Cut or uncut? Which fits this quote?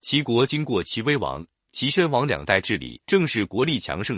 cut